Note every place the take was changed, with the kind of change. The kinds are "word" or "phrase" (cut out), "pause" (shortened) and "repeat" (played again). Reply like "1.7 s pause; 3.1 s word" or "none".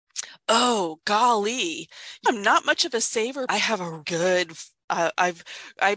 2.3 s word; 3.5 s word; 4.0 s word